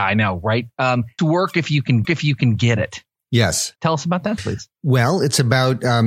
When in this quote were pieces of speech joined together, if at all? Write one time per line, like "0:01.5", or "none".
0:01.2
0:02.0
0:03.8
0:04.4

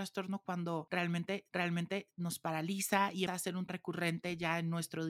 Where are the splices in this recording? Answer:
0:01.5
0:03.3
0:03.7

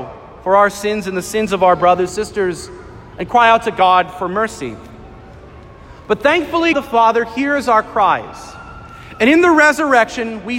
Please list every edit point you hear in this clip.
0:02.1
0:06.7

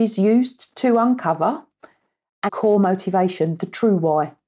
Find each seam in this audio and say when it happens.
0:02.5

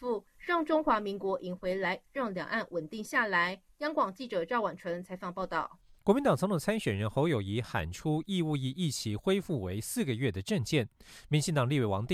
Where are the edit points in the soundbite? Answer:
0:06.0

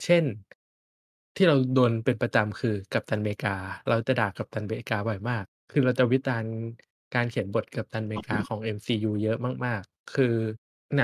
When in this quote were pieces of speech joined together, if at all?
none

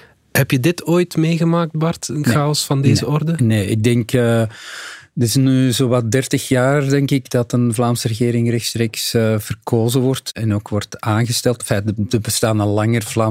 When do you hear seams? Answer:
none

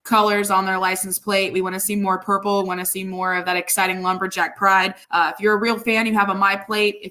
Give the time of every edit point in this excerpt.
0:05.0

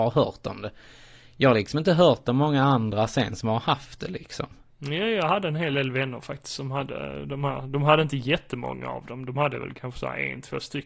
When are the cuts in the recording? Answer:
none

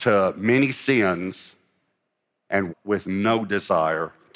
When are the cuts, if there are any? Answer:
0:02.7

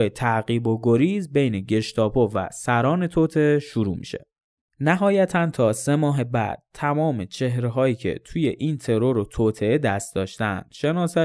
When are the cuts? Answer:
none

